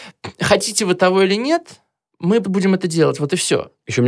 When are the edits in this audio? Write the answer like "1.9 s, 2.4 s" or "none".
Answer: 2.4 s